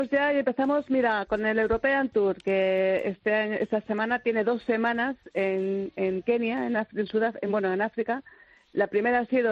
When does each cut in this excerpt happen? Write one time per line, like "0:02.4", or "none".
none